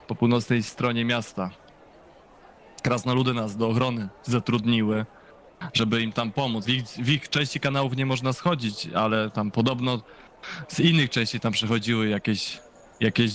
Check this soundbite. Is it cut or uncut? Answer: cut